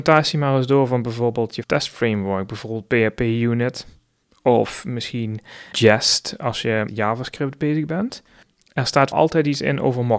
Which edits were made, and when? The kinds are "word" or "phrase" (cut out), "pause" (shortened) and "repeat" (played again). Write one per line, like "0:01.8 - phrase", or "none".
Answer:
0:01.6 - word
0:05.7 - word
0:06.9 - word
0:09.1 - word